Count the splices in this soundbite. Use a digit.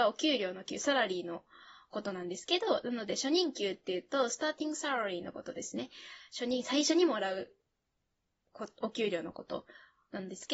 0